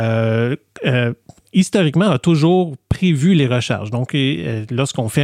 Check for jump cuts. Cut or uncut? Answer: uncut